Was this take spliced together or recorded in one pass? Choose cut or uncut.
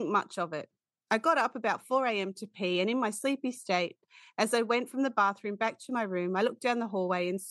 uncut